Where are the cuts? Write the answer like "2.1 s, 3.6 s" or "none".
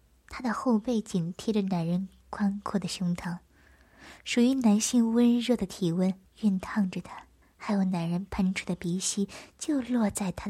6.2 s, 7.4 s